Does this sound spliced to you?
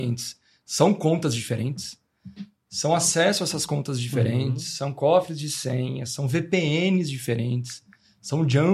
no; 0 cuts

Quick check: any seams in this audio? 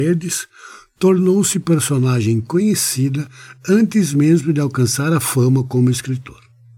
no; 0 cuts

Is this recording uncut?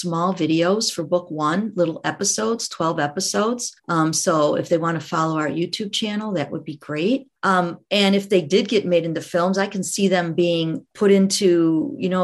no; 3 cuts; at 3.8 s, 7.4 s, 10.9 s

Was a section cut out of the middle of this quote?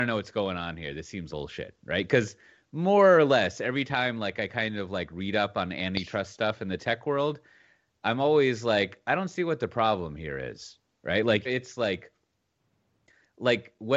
yes; 2 cuts; at 1.3 s, 11.4 s

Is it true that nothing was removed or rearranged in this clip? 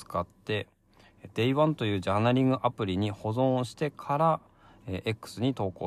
yes; 0 cuts

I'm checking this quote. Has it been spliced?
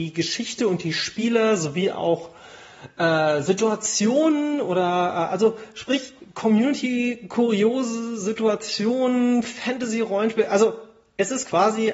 no; 0 cuts

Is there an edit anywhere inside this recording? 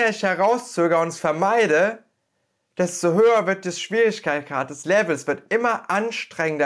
no; 0 cuts

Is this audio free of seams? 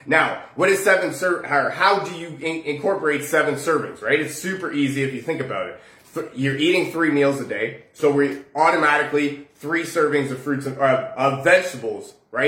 yes; 0 cuts

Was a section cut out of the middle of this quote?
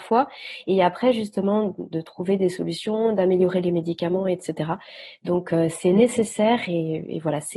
no; 0 cuts

